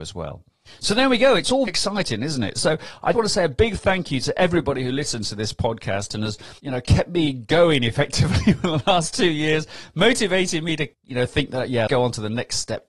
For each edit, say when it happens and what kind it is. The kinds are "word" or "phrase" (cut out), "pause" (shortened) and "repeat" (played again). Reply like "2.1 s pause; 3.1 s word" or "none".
1.7 s word; 3.1 s word; 6.6 s pause; 10.9 s pause; 11.9 s word